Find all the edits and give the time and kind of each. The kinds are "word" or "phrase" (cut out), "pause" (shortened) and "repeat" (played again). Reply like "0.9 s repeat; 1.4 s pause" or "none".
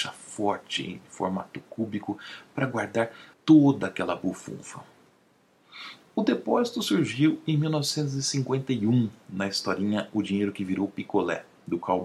3.3 s pause